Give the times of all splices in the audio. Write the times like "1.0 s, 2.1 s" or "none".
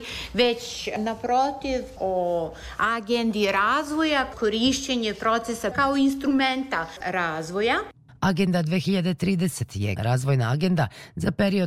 2.0 s, 4.3 s, 5.7 s, 7.0 s, 10.0 s